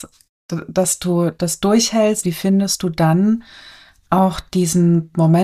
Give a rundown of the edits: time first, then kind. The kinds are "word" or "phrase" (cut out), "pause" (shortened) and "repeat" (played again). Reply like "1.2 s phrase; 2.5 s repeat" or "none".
2.2 s word